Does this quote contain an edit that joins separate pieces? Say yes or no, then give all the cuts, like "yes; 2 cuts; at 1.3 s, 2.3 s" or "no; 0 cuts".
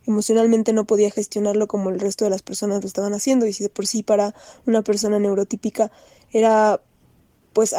no; 0 cuts